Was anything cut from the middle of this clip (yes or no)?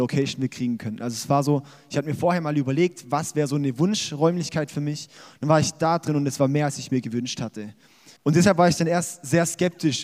yes